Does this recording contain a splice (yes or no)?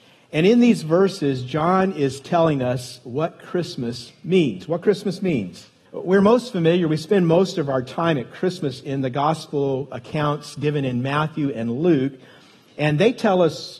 yes